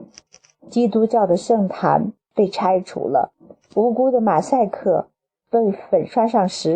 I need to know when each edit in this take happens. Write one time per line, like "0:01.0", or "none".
none